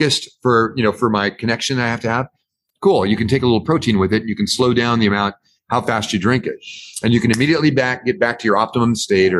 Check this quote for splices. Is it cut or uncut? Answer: uncut